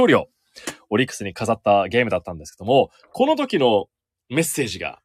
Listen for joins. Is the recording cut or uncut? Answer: uncut